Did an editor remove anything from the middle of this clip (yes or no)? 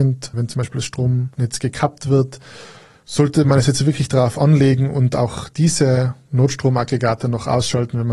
no